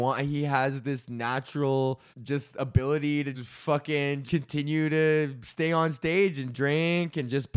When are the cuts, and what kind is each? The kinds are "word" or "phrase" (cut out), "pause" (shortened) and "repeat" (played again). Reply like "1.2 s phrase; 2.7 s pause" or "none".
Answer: 2.1 s pause; 3.3 s word; 4.2 s word